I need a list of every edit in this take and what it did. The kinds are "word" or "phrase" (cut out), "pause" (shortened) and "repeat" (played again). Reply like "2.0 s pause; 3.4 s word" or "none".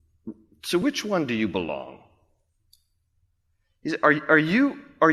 none